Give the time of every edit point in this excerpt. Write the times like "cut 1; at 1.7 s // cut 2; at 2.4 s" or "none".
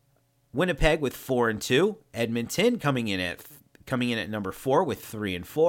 none

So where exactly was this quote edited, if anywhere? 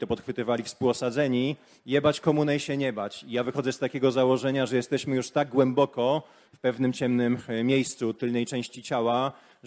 none

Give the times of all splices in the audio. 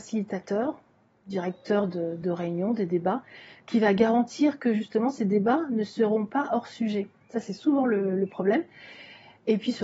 none

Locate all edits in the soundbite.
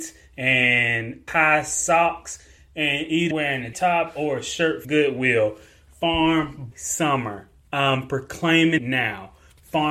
cut 1; at 1.3 s // cut 2; at 3.3 s // cut 3; at 3.7 s // cut 4; at 4.8 s // cut 5; at 6.7 s // cut 6; at 8.8 s

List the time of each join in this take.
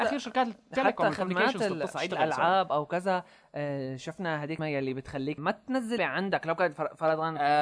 cut 1; at 1.9 s // cut 2; at 4.6 s // cut 3; at 5.4 s // cut 4; at 6.0 s

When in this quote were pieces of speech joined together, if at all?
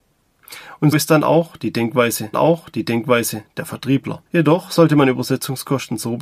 cut 1; at 0.9 s // cut 2; at 2.3 s // cut 3; at 4.3 s

